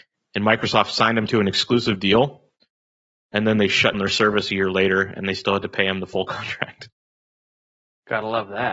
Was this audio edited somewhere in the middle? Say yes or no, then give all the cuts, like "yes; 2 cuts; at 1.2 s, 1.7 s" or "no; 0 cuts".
yes; 1 cut; at 3.9 s